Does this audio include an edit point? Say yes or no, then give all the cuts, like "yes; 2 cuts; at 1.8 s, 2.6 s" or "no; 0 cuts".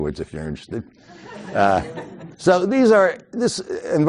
yes; 1 cut; at 2.3 s